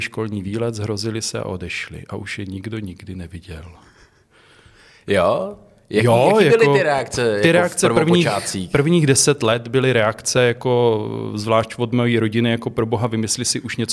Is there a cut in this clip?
no; 0 cuts

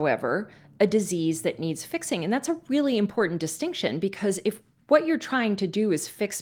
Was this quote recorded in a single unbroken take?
yes; 0 cuts

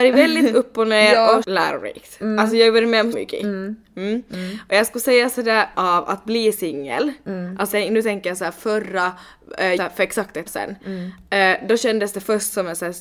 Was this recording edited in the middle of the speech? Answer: yes; 6 cuts; at 1.4 s, 3.1 s, 5.7 s, 7.7 s, 9.8 s, 10.5 s

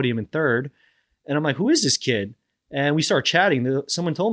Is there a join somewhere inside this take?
no; 0 cuts

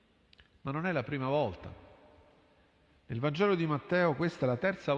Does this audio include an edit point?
no; 0 cuts

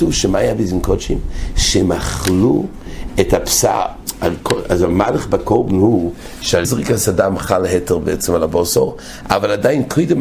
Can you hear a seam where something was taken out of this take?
yes; 1 cut; at 6.6 s

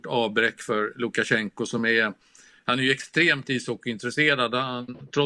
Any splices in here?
no; 0 cuts

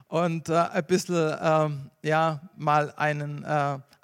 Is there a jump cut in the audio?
no; 0 cuts

